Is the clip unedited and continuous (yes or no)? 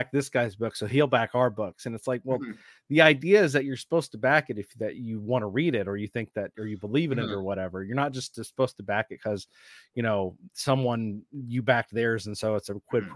yes